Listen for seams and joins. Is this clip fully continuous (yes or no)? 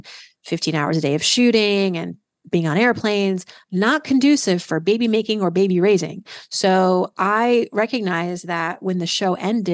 yes